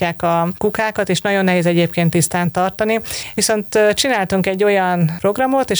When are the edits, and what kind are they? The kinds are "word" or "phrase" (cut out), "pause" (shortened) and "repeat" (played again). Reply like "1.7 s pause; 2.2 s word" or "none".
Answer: none